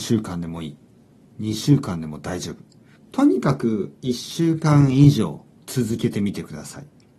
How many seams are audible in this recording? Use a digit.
2